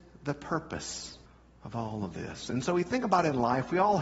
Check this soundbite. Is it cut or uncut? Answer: cut